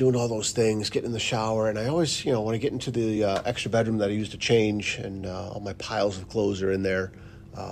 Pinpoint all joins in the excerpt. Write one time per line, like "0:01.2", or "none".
none